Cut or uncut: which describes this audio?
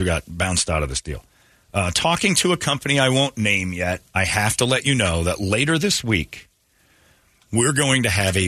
uncut